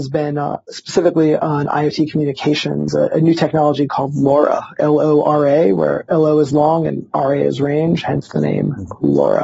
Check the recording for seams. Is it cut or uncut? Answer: uncut